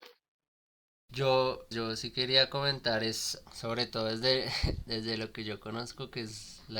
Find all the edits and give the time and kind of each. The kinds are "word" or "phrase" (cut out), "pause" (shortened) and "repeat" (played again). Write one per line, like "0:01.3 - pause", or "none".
0:01.7 - word
0:03.5 - pause